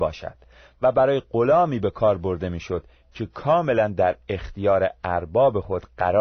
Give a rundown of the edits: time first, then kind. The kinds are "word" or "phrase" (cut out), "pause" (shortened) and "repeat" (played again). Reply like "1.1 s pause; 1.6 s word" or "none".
none